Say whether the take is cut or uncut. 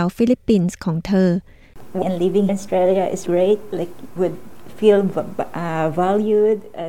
cut